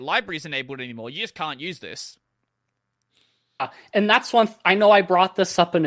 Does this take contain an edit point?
no; 0 cuts

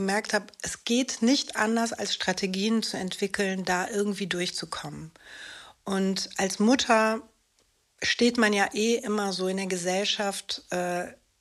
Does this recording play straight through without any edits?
yes; 0 cuts

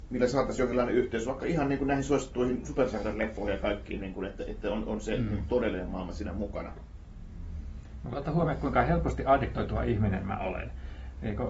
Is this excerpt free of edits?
yes; 0 cuts

